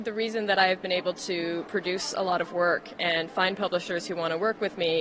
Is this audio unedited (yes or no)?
yes